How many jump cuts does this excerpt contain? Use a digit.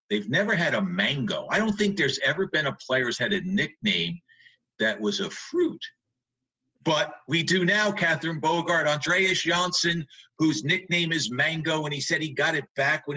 0